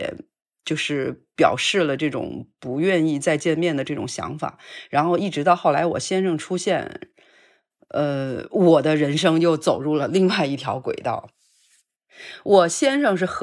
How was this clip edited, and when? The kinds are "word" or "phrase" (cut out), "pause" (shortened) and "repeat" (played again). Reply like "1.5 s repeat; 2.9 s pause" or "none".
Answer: none